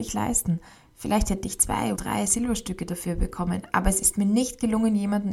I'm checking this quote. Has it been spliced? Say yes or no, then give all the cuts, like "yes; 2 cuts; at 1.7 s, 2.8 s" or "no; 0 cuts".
yes; 1 cut; at 1.9 s